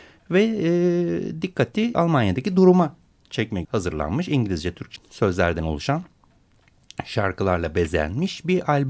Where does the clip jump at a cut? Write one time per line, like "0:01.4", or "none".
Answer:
0:01.9
0:03.6
0:05.0